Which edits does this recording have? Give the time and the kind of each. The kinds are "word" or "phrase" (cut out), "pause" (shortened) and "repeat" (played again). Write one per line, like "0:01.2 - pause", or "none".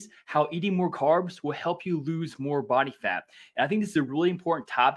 none